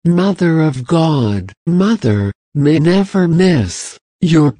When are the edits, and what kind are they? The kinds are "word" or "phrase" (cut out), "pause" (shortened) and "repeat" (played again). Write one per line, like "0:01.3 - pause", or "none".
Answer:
0:01.7 - word
0:02.8 - word